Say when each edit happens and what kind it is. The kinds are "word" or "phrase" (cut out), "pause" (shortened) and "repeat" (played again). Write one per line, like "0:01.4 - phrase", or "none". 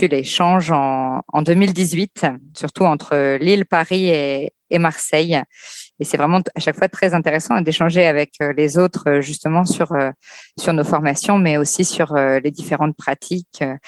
none